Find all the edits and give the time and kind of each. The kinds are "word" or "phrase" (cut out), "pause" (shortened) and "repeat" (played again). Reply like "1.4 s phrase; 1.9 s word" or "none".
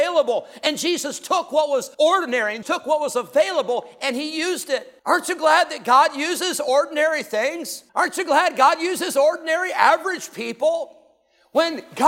1.9 s pause; 2.6 s word; 5.0 s pause; 7.9 s pause